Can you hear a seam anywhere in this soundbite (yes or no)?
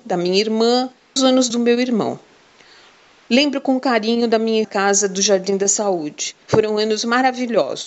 yes